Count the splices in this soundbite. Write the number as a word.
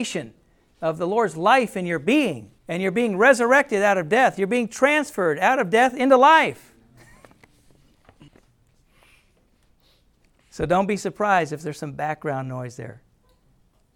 two